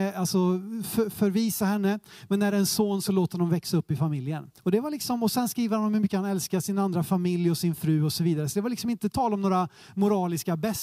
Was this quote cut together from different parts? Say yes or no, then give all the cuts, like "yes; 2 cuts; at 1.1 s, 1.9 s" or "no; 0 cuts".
yes; 1 cut; at 4.6 s